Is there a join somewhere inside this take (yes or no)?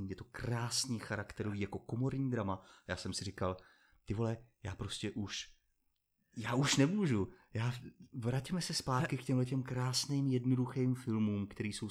no